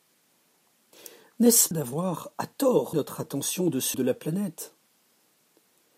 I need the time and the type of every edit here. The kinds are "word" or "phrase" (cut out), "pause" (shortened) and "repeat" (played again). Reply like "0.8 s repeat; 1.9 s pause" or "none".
1.7 s word; 2.9 s word; 3.9 s word